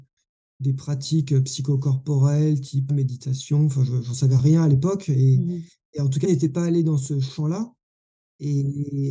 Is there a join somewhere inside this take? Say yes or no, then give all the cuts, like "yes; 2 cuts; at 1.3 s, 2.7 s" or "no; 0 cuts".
yes; 2 cuts; at 2.9 s, 6.2 s